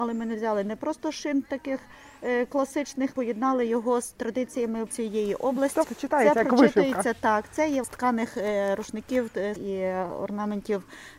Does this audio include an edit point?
yes; 5 cuts; at 3.1 s, 4.9 s, 5.8 s, 7.8 s, 9.6 s

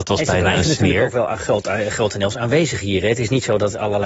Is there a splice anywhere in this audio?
no; 0 cuts

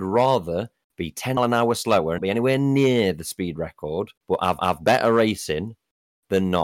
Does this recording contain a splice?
yes; 4 cuts; at 1.4 s, 2.2 s, 4.2 s, 4.6 s

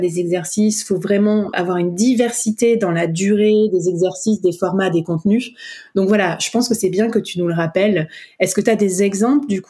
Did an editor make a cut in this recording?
yes; 1 cut; at 1.5 s

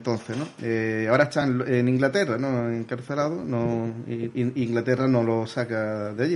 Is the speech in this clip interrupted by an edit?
no; 0 cuts

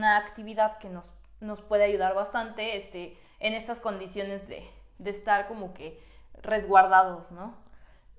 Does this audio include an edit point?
no; 0 cuts

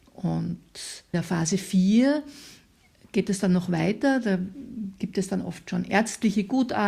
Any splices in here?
yes; 1 cut; at 1.1 s

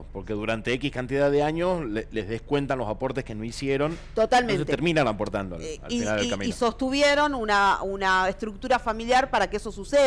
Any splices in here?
no; 0 cuts

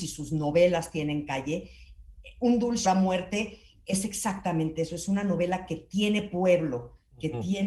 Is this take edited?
yes; 1 cut; at 2.8 s

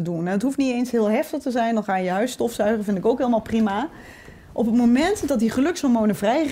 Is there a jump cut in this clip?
no; 0 cuts

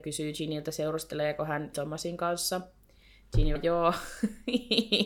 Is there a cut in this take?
yes; 2 cuts; at 1.7 s, 3.6 s

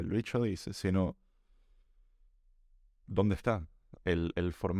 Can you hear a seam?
no; 0 cuts

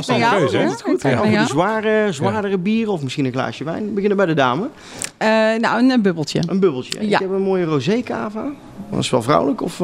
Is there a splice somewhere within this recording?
no; 0 cuts

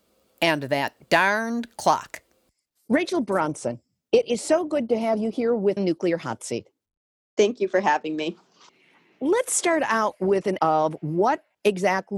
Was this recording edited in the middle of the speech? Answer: yes; 2 cuts; at 5.8 s, 10.6 s

